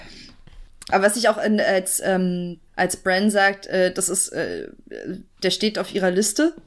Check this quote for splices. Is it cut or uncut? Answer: cut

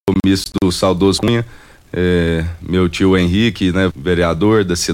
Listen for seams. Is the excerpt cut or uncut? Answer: cut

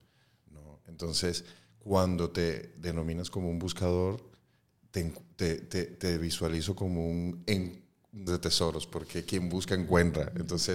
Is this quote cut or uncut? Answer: cut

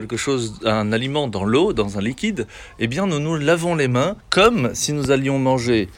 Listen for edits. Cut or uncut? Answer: cut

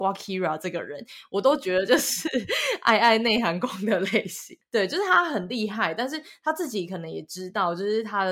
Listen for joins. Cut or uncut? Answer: uncut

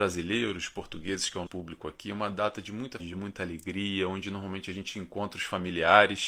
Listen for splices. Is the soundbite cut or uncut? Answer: cut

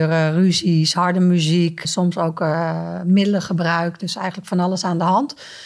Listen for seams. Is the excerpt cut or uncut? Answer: cut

